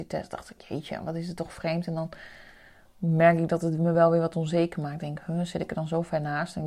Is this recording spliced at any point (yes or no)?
no